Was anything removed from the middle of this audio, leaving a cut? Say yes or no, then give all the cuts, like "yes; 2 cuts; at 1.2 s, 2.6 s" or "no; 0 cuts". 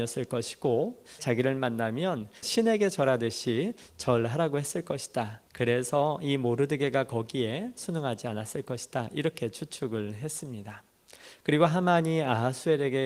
yes; 3 cuts; at 1.2 s, 2.4 s, 5.5 s